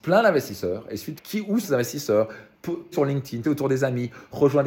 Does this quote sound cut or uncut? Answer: cut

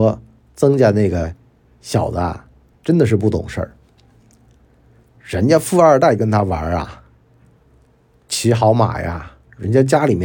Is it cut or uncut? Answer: uncut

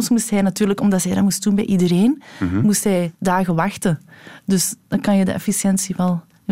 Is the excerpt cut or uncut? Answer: cut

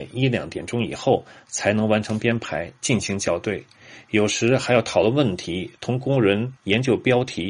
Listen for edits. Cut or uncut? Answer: cut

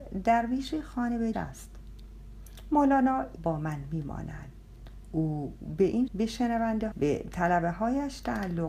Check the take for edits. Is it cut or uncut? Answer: cut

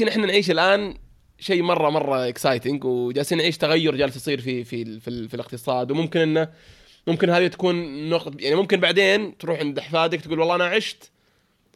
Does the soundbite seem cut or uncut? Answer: uncut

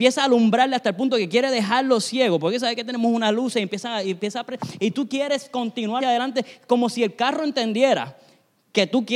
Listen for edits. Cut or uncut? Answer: cut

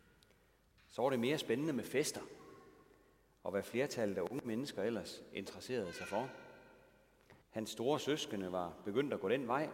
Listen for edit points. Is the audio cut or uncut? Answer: cut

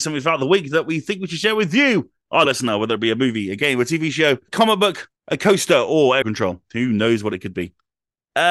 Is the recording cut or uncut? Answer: cut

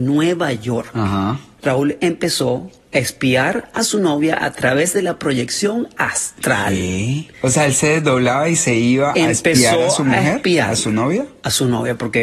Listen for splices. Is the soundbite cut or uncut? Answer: uncut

